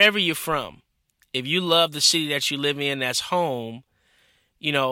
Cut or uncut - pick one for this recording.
uncut